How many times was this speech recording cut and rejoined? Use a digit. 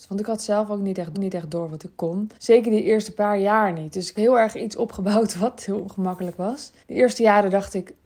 4